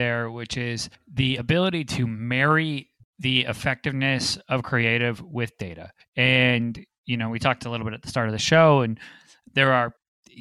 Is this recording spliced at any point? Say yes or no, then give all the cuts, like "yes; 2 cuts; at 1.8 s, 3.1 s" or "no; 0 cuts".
no; 0 cuts